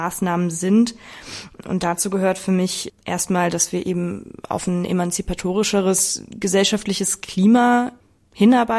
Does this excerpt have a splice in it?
no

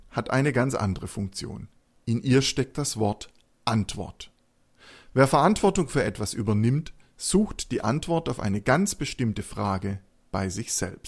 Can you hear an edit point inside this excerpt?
no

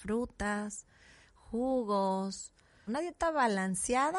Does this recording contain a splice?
yes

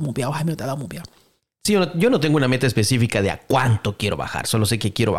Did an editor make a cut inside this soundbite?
no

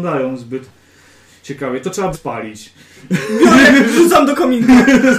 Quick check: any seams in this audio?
yes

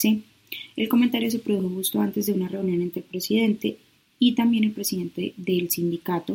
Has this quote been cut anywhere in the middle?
no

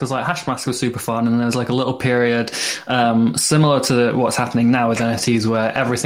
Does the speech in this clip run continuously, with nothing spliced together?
yes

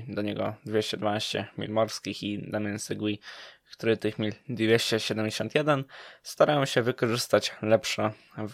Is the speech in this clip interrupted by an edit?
yes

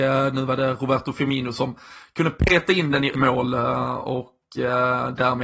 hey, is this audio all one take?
no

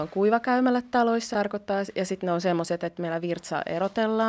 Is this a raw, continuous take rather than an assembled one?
no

